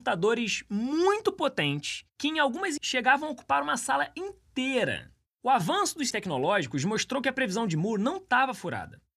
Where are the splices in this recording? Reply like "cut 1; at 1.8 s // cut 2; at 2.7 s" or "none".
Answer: cut 1; at 2.8 s // cut 2; at 5.3 s // cut 3; at 6.1 s

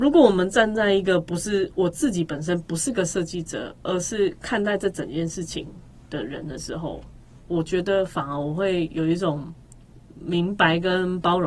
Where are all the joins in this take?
cut 1; at 6.0 s

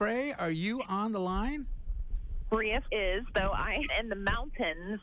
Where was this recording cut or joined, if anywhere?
cut 1; at 2.8 s // cut 2; at 3.9 s

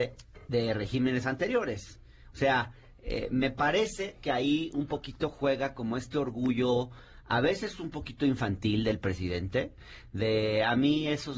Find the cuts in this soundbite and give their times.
none

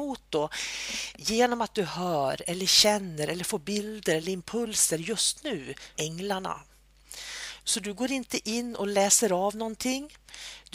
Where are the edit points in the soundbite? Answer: cut 1; at 5.9 s

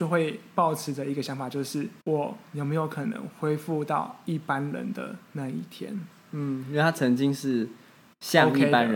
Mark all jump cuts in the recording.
cut 1; at 2.0 s

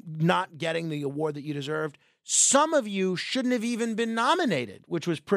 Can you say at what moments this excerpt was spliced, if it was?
none

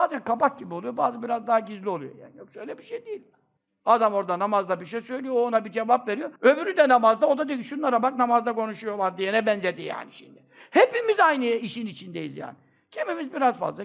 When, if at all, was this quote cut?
cut 1; at 3.6 s // cut 2; at 6.4 s

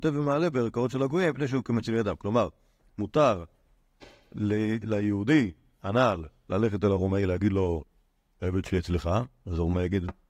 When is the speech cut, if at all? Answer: none

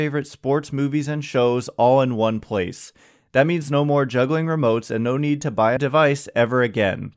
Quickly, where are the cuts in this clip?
cut 1; at 5.8 s

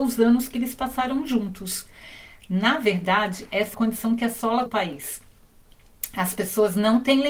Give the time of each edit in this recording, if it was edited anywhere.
cut 1; at 3.7 s // cut 2; at 4.7 s

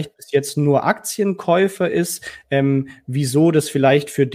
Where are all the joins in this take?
none

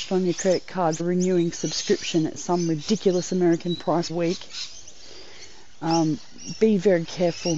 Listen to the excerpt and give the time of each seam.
cut 1; at 1.0 s // cut 2; at 4.1 s

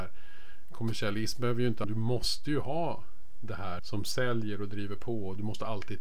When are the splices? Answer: cut 1; at 1.8 s // cut 2; at 3.8 s

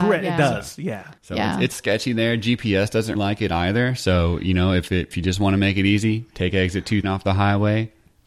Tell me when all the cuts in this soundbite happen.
cut 1; at 1.2 s // cut 2; at 1.7 s // cut 3; at 3.1 s // cut 4; at 5.1 s // cut 5; at 7.0 s

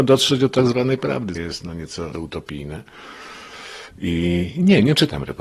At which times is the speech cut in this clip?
cut 1; at 1.3 s // cut 2; at 2.1 s

